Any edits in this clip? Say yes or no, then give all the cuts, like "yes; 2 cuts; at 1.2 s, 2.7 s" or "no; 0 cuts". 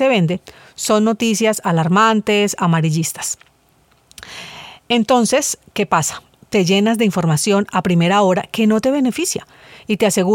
no; 0 cuts